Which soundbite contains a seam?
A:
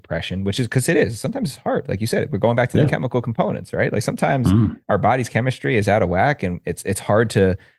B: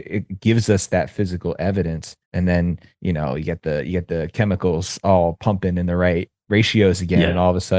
B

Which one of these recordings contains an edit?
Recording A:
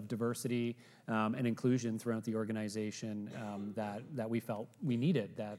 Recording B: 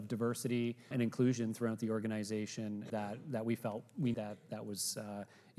B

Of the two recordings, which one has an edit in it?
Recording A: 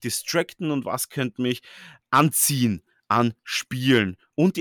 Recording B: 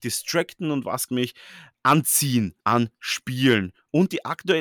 B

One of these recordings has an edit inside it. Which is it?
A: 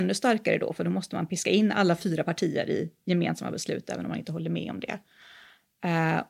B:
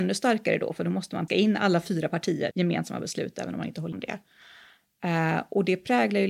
B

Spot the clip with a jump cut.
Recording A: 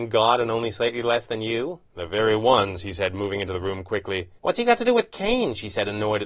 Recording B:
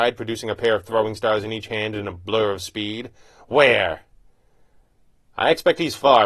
A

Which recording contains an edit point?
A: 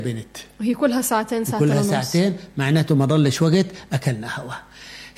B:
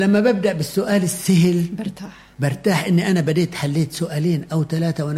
B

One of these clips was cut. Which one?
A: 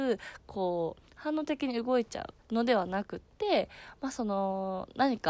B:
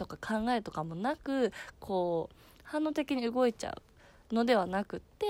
A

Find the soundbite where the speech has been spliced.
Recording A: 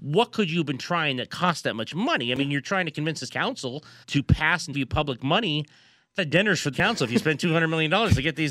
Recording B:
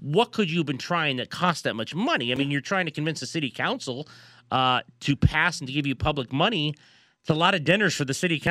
A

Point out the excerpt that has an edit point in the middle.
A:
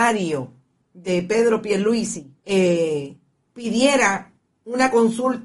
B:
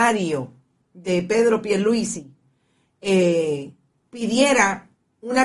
A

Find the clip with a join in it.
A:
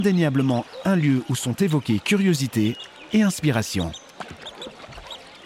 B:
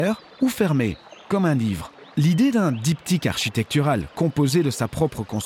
B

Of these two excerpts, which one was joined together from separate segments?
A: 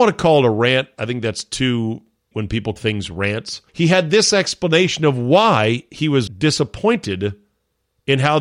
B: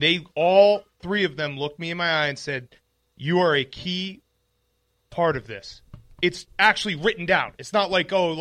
A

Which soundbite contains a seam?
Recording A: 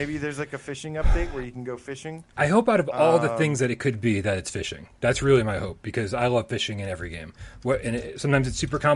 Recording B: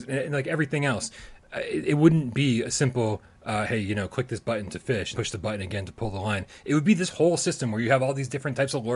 B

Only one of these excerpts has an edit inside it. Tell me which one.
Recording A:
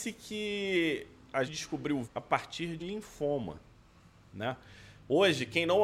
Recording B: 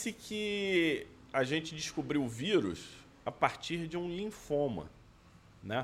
A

